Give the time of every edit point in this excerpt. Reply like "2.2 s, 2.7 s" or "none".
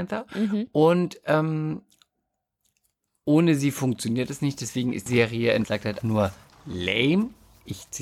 5.1 s, 5.6 s, 6.0 s